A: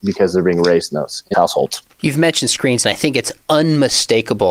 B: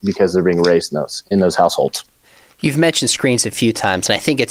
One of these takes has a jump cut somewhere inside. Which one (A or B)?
A